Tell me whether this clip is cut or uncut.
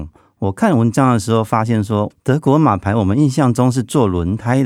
cut